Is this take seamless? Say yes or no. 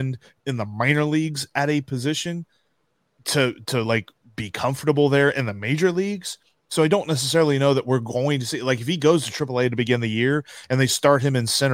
yes